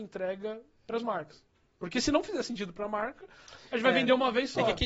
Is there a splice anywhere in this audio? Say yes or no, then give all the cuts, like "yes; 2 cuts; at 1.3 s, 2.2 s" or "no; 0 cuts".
no; 0 cuts